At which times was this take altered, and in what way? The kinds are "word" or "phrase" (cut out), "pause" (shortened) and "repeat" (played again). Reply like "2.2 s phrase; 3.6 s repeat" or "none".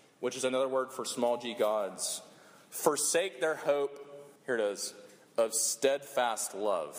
4.4 s pause